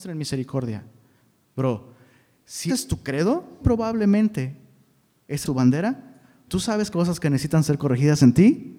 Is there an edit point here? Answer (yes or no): yes